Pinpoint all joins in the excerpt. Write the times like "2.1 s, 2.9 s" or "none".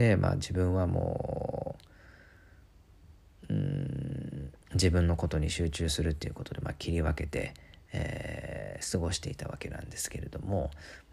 4.6 s